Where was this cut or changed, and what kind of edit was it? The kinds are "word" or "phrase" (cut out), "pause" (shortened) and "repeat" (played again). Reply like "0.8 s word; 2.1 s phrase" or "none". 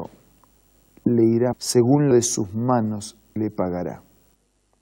1.5 s word; 2.1 s word; 3.4 s word